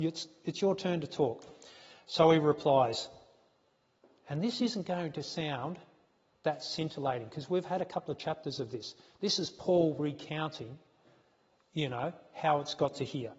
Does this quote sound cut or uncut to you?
uncut